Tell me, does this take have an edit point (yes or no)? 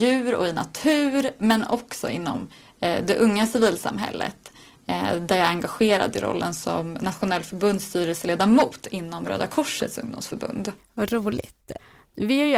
no